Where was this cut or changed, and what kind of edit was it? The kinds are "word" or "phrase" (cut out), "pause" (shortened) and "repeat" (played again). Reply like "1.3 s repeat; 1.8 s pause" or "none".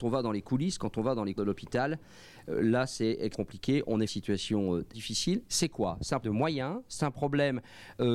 1.4 s word; 3.3 s word; 4.1 s phrase; 4.9 s word; 6.2 s word